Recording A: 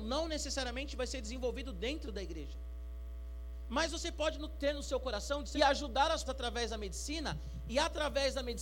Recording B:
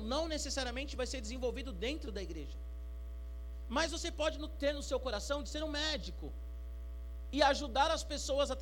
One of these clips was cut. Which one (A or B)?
A